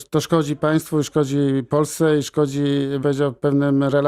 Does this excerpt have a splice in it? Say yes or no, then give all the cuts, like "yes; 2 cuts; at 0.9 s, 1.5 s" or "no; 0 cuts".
yes; 1 cut; at 3.0 s